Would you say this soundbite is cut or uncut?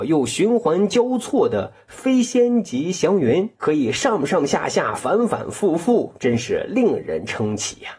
cut